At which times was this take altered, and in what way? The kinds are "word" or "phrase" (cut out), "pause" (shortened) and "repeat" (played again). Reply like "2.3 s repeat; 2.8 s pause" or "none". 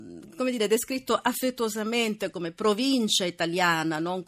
2.3 s word